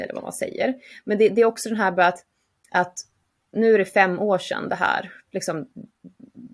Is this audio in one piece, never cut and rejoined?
yes; 0 cuts

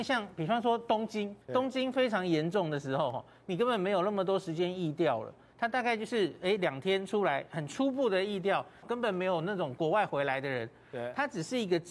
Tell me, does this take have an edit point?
yes; 2 cuts; at 1.4 s, 8.8 s

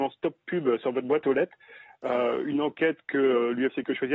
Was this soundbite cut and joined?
no; 0 cuts

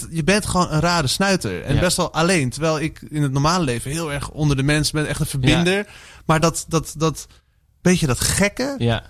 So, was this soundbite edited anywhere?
no; 0 cuts

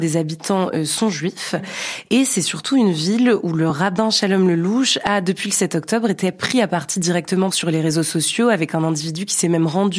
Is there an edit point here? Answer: no; 0 cuts

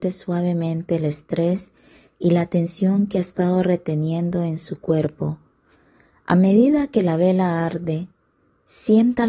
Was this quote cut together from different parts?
no; 0 cuts

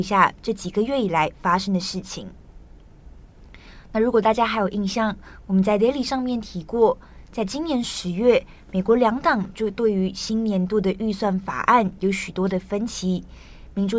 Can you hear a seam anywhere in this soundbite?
no; 0 cuts

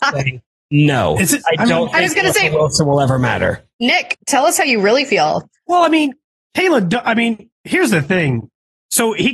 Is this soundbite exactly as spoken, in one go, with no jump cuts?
yes; 0 cuts

